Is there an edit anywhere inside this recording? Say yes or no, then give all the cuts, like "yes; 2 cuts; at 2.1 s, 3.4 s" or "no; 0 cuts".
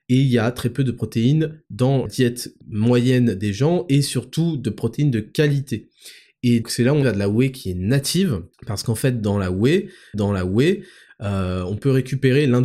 yes; 6 cuts; at 2.1 s, 2.6 s, 6.6 s, 7.0 s, 8.5 s, 10.1 s